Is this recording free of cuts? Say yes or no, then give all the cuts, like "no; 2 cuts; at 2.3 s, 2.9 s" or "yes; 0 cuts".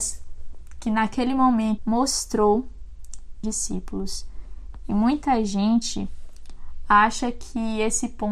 no; 2 cuts; at 1.8 s, 3.4 s